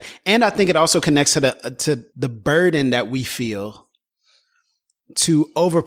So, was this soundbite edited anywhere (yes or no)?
yes